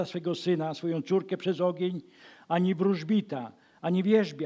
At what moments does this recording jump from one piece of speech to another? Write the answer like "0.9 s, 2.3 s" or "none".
none